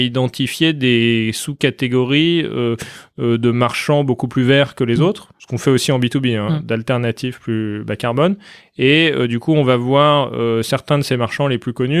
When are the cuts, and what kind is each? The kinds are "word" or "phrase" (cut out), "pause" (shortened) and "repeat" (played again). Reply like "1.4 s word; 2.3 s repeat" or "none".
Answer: none